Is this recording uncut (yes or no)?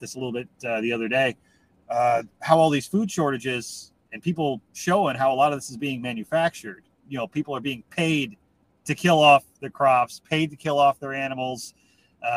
yes